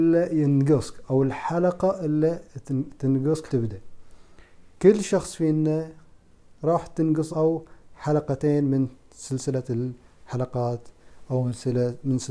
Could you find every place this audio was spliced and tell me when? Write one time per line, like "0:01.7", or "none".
0:03.5
0:07.3

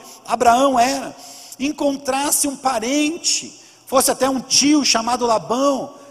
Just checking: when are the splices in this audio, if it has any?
none

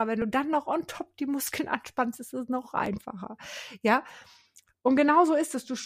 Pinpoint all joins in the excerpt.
none

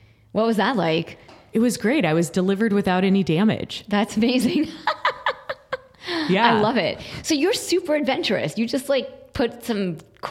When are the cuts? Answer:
none

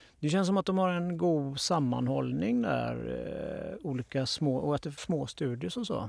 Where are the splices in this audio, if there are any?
0:05.0

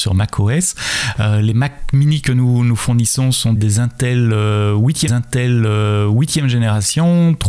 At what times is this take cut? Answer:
0:03.6
0:05.1

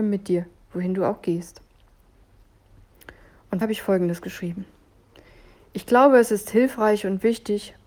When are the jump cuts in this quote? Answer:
0:03.6

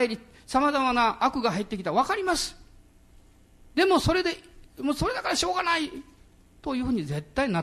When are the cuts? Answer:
none

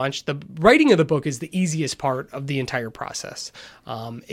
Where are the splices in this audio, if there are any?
none

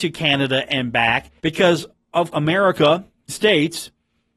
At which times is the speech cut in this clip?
0:01.4
0:02.3
0:03.3

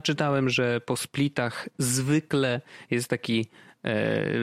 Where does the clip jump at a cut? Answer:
none

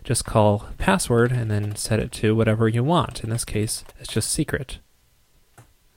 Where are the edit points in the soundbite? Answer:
0:03.9

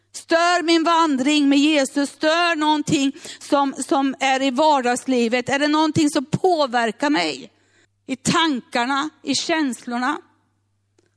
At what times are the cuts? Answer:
0:07.8

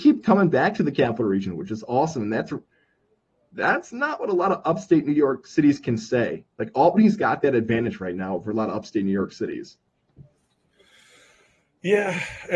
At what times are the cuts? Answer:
none

